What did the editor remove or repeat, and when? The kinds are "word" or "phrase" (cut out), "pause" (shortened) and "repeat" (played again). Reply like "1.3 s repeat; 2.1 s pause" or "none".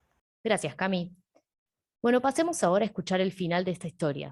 none